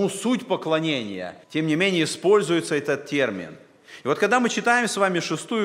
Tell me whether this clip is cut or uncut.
cut